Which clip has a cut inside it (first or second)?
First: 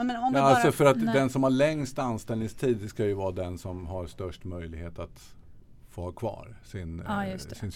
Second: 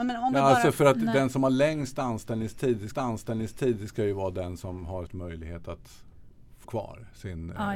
second